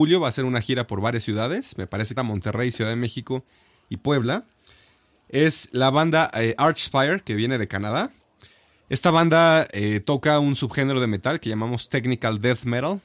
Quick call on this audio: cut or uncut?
cut